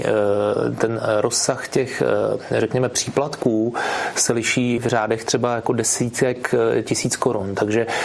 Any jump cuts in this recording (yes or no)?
yes